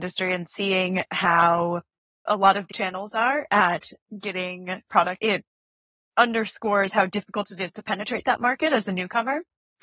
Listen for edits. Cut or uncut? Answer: cut